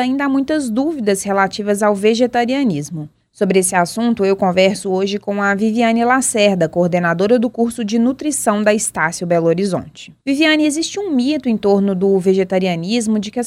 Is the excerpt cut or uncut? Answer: uncut